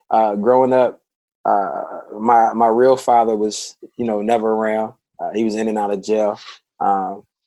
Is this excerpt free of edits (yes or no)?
yes